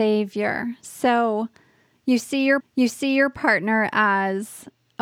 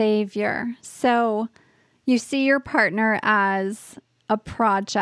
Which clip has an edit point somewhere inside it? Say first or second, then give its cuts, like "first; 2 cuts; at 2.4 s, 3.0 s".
first; 1 cut; at 2.6 s